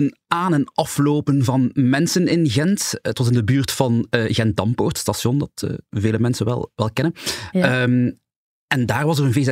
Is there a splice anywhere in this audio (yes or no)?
no